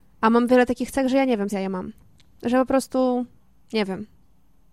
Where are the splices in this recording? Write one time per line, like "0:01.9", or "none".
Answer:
0:01.5